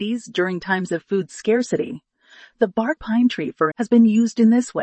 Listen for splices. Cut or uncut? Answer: cut